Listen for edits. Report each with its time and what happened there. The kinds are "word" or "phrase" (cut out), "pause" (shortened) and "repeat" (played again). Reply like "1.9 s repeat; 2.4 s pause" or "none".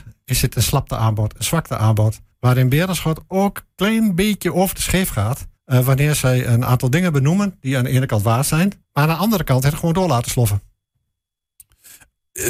2.3 s pause; 5.6 s pause; 8.8 s pause